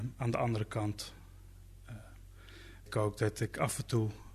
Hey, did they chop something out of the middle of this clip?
yes; 1 cut; at 2.9 s

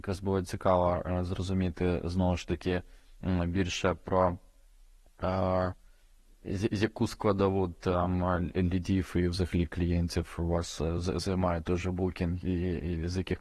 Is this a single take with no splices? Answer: yes; 0 cuts

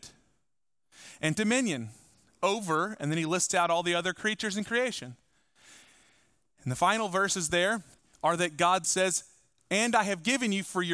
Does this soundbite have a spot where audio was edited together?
yes; 3 cuts; at 1.3 s, 8.0 s, 8.8 s

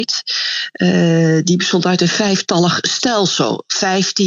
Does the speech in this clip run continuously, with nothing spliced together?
yes; 0 cuts

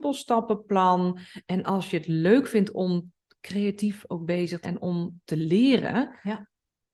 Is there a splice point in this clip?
yes; 1 cut; at 4.6 s

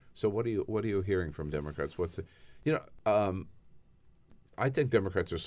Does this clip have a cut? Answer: no; 0 cuts

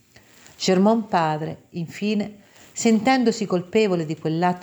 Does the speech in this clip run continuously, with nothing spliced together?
yes; 0 cuts

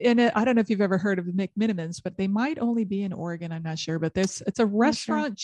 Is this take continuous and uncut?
yes; 0 cuts

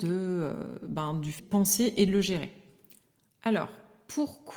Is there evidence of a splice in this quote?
yes; 1 cut; at 1.4 s

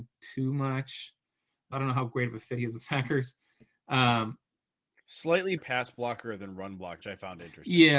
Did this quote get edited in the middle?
yes; 3 cuts; at 1.7 s, 5.6 s, 7.0 s

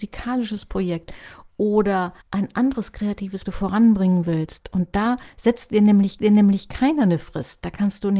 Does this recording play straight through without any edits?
no; 3 cuts; at 2.2 s, 3.4 s, 6.2 s

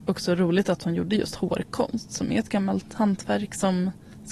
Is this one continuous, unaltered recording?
yes; 0 cuts

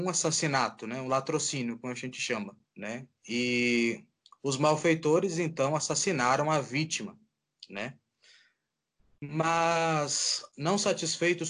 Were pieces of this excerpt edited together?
yes; 1 cut; at 2.6 s

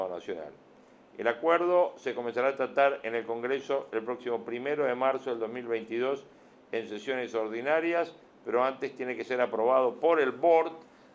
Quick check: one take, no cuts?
yes; 0 cuts

